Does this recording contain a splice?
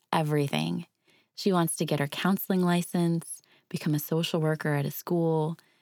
no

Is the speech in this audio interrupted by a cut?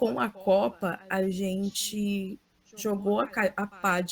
no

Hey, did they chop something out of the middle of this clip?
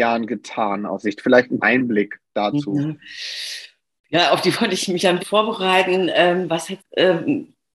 yes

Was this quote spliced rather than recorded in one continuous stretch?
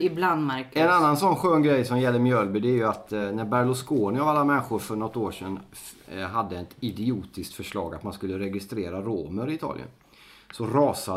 no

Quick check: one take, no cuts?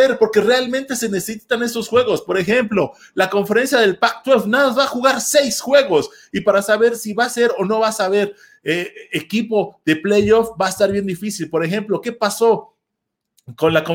yes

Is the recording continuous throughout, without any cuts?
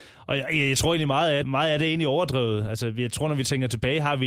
no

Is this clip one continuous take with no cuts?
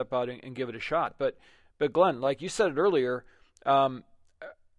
yes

